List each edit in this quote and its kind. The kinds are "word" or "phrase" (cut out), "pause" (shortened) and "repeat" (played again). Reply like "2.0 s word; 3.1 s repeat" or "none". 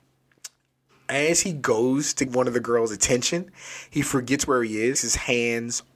2.3 s word; 4.9 s word